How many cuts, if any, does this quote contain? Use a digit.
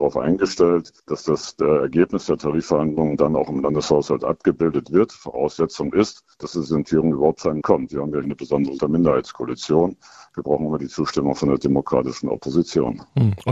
5